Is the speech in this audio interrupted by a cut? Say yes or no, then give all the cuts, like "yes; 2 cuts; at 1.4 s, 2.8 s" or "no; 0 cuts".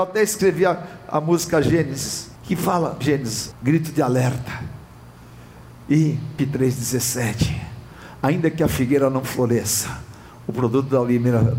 yes; 4 cuts; at 2.4 s, 3.0 s, 3.5 s, 6.4 s